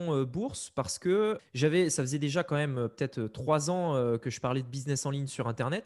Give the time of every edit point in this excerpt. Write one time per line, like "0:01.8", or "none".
0:01.4